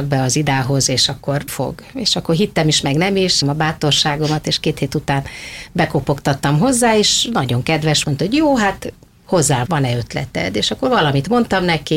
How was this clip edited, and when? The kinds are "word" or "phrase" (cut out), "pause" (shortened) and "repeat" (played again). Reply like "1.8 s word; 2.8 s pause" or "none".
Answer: 1.5 s word; 3.4 s word; 8.0 s phrase; 9.7 s word